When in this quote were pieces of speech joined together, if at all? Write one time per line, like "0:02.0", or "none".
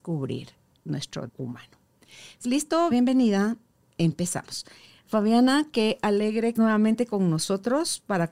0:01.3
0:02.4
0:02.9
0:06.5